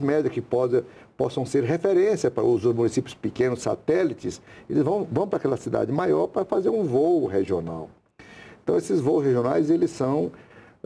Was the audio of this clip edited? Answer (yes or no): no